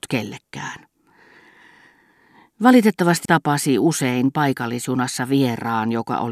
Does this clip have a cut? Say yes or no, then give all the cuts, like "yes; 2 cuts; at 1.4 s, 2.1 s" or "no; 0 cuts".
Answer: yes; 1 cut; at 3.2 s